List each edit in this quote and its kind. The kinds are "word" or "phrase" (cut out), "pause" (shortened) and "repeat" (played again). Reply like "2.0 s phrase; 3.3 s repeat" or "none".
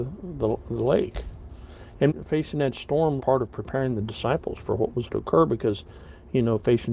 2.1 s word; 3.2 s word; 5.1 s word